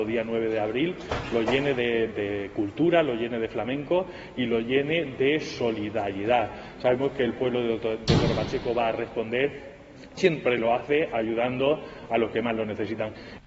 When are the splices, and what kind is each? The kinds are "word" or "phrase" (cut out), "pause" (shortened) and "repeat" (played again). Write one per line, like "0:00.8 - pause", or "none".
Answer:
0:02.1 - word
0:10.2 - word